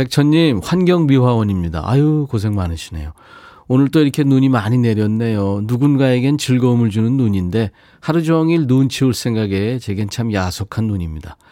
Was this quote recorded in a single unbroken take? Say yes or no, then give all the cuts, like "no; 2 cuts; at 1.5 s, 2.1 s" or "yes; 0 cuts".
yes; 0 cuts